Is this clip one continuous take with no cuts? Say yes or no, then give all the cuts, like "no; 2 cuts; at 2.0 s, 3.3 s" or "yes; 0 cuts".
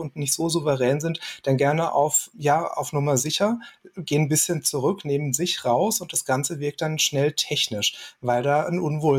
no; 2 cuts; at 1.6 s, 2.3 s